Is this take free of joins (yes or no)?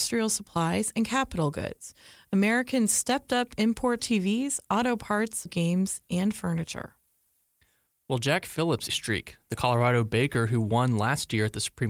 no